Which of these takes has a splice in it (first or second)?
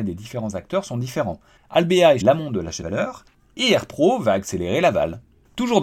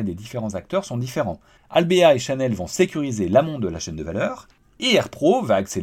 first